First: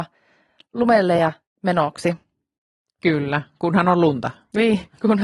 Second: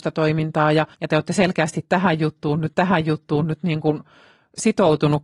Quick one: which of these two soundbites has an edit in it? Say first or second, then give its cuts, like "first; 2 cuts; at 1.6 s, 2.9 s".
second; 2 cuts; at 0.9 s, 2.7 s